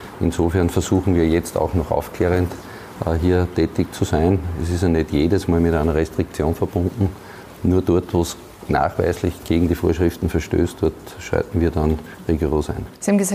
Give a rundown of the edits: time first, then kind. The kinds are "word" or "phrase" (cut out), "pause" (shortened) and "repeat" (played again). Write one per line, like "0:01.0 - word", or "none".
none